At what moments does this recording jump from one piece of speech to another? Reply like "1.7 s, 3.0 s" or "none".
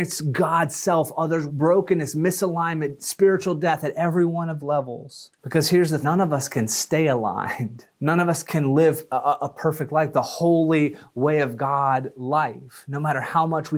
1.5 s, 4.6 s, 5.4 s, 6.0 s, 7.9 s, 8.4 s, 9.1 s